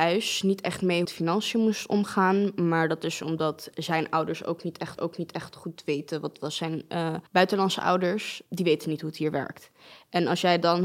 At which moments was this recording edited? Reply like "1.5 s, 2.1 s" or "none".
1.0 s, 5.0 s, 7.3 s